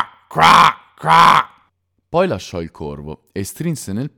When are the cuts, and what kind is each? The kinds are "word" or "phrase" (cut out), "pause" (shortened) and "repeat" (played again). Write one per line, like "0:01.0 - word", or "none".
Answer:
0:01.7 - pause